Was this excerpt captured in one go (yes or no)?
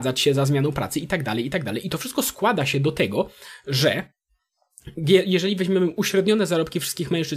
yes